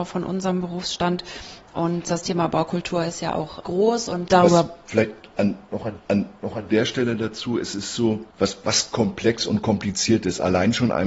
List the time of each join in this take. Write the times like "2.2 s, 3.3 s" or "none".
6.0 s, 8.3 s